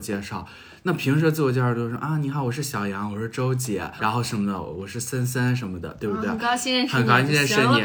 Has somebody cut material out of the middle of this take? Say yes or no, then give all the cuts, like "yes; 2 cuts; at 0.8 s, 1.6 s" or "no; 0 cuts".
yes; 1 cut; at 4.0 s